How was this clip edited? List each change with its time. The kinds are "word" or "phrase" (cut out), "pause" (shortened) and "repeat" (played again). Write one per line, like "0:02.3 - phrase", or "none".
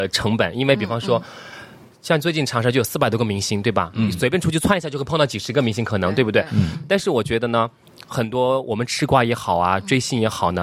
none

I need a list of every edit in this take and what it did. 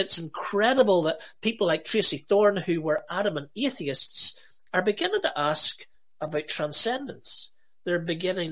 none

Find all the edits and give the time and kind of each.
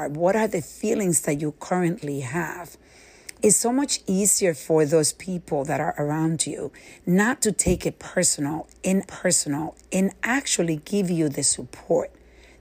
0:03.4 - word
0:09.1 - repeat

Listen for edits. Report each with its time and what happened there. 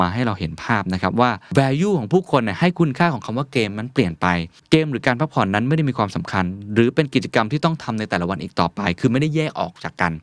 none

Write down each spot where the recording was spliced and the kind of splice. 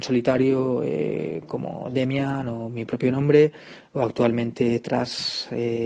none

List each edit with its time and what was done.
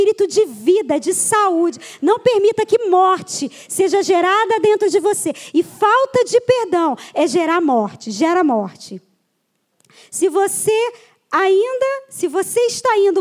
none

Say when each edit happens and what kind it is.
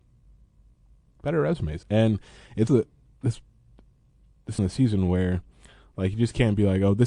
0:01.8 - phrase
0:02.7 - word
0:04.6 - word

